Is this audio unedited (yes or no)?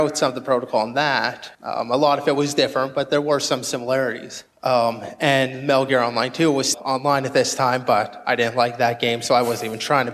no